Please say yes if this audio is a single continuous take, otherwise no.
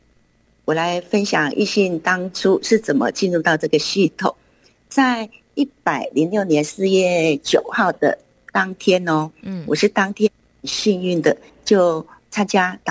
yes